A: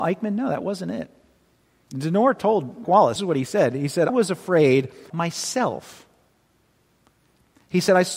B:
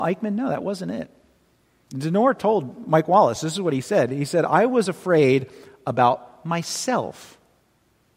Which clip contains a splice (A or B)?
A